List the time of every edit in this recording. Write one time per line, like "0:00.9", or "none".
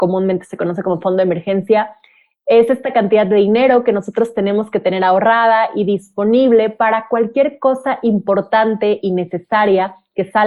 none